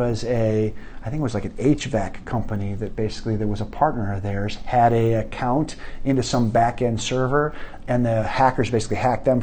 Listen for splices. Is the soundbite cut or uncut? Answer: uncut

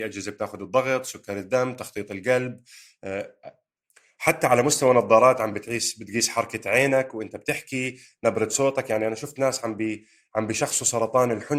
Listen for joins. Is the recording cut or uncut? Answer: uncut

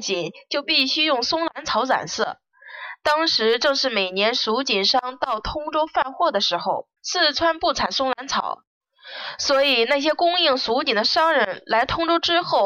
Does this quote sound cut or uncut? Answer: cut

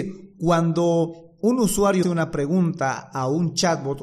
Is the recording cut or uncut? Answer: cut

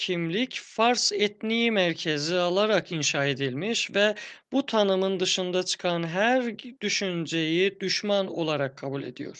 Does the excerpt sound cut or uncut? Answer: uncut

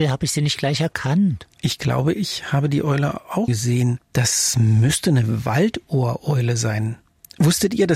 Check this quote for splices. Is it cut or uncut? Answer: cut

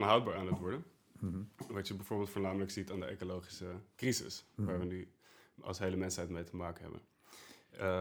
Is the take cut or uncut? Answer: uncut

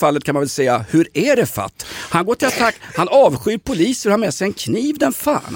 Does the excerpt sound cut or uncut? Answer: uncut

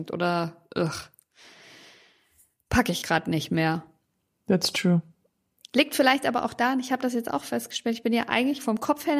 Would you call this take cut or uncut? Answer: cut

